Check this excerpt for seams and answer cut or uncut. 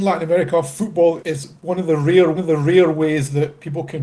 cut